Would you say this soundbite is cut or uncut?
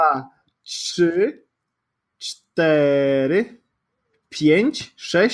uncut